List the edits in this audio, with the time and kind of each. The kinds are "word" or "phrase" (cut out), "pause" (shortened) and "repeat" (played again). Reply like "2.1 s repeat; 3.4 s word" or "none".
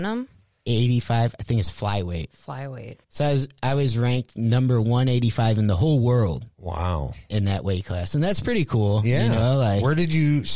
3.0 s pause